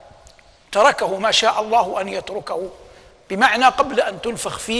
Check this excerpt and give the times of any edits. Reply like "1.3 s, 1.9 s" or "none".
none